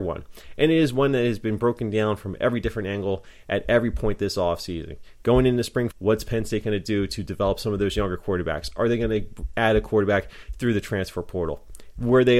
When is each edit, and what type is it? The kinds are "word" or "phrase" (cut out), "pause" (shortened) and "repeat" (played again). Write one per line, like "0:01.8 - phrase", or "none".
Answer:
0:05.9 - word